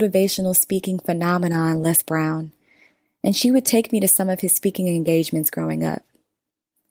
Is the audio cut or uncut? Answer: uncut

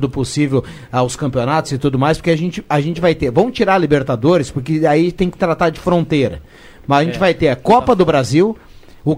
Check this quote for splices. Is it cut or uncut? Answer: uncut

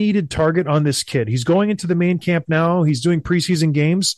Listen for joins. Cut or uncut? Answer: uncut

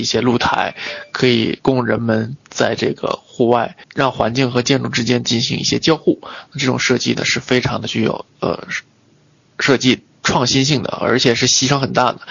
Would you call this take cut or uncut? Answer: cut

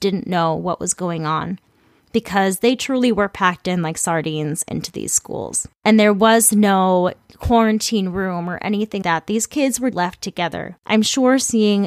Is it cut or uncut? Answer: cut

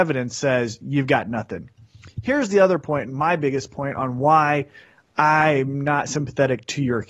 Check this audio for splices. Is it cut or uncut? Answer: uncut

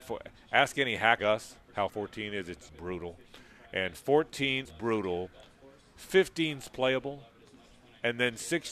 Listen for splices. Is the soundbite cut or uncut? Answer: cut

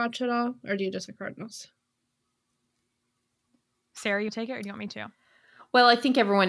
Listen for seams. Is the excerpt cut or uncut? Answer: cut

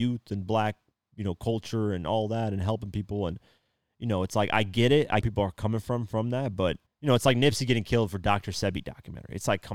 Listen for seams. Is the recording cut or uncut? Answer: cut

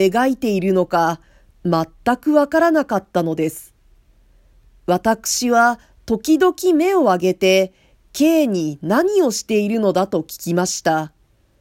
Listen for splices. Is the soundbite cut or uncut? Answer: uncut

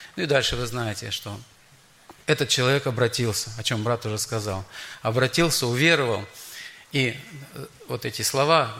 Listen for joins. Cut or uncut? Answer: cut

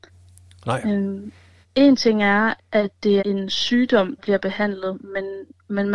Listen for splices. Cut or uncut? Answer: cut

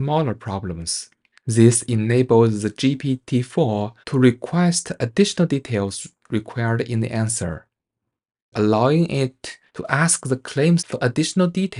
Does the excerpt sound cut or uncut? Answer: cut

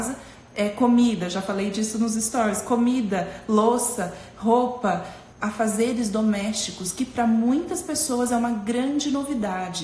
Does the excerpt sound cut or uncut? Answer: cut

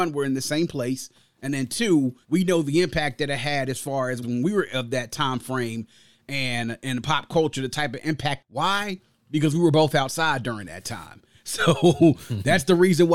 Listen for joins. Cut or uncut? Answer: cut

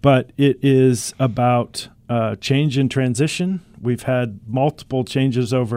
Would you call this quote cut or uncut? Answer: uncut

